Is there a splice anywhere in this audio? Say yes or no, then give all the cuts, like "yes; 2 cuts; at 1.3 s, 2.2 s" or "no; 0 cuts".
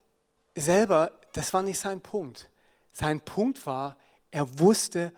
no; 0 cuts